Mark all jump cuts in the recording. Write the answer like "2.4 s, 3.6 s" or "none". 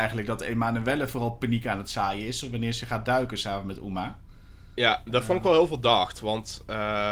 none